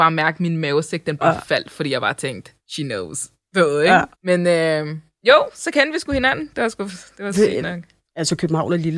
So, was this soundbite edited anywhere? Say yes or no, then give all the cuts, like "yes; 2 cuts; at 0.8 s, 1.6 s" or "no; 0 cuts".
yes; 2 cuts; at 2.6 s, 4.1 s